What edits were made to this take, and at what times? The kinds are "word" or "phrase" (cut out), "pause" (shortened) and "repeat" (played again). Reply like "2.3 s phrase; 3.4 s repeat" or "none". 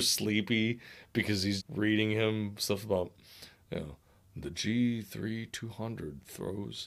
1.6 s word

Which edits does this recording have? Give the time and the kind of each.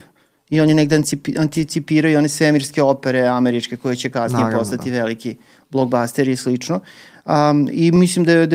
none

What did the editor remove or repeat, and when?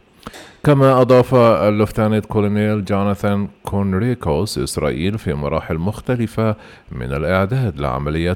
3.6 s pause

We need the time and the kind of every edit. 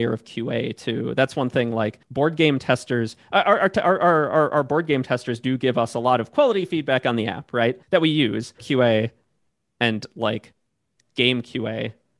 2.0 s pause; 7.8 s pause; 8.6 s phrase

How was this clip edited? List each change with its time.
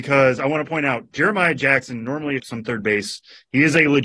2.4 s word

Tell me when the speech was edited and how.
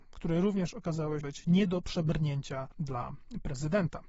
1.2 s word

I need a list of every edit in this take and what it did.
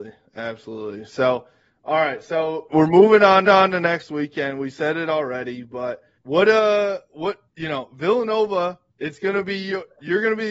2.7 s word; 3.4 s repeat; 6.2 s pause; 8.9 s pause

